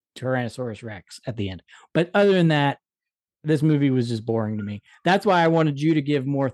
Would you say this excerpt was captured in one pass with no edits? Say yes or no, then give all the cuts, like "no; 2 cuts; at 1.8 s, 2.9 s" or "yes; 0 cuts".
yes; 0 cuts